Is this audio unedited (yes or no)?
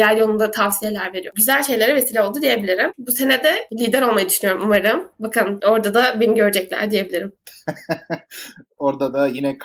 yes